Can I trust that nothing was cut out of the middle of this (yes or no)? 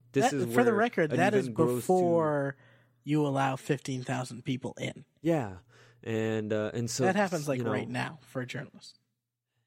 yes